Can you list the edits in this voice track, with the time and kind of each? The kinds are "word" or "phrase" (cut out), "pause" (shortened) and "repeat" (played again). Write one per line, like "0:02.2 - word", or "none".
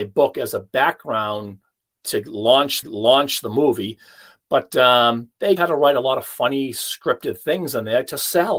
0:02.8 - repeat
0:05.6 - word